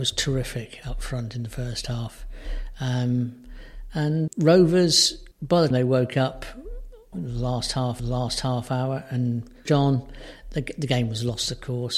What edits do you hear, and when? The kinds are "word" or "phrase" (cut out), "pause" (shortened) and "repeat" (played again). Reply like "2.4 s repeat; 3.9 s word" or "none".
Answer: 4.3 s word; 5.3 s pause; 5.7 s word; 7.1 s word; 8.0 s repeat; 9.6 s word